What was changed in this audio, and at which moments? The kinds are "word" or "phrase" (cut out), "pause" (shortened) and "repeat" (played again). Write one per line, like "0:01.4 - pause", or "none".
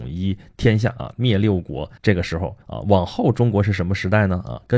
0:02.0 - pause
0:02.6 - pause